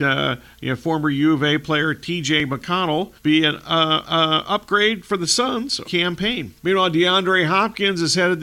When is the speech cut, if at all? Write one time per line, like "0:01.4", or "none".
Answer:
0:03.2
0:04.0
0:05.8
0:06.6